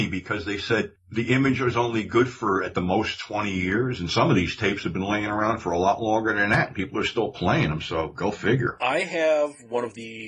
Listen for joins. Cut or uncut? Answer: uncut